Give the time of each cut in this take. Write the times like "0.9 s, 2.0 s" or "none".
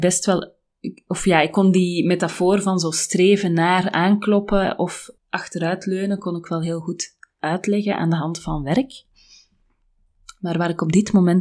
5.2 s